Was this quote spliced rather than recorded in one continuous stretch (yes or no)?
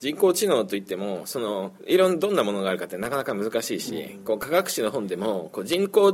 yes